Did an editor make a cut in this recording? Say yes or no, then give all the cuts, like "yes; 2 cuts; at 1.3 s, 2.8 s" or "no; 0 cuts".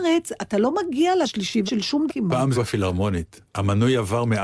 yes; 4 cuts; at 1.2 s, 1.7 s, 2.1 s, 2.5 s